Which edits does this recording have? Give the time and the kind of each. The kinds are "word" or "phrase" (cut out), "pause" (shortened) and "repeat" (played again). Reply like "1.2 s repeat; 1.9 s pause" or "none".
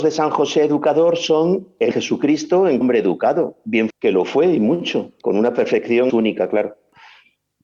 1.9 s word; 2.8 s word; 3.9 s word; 6.1 s word